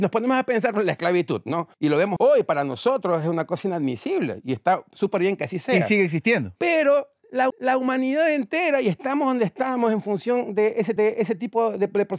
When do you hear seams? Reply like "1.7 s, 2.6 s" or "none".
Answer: 1.7 s, 2.2 s, 7.5 s, 11.0 s